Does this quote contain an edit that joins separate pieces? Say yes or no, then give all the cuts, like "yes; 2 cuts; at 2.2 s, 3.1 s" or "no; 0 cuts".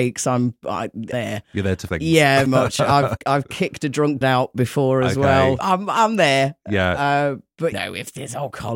yes; 7 cuts; at 1.1 s, 1.9 s, 2.5 s, 3.2 s, 4.2 s, 5.6 s, 7.7 s